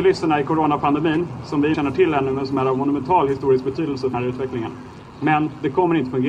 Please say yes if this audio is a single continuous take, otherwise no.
no